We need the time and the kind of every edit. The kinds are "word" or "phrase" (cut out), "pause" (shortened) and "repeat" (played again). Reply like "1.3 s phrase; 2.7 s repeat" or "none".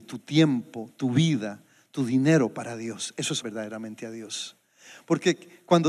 3.4 s word